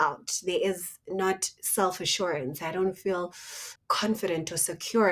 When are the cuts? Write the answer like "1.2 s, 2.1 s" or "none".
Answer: 3.8 s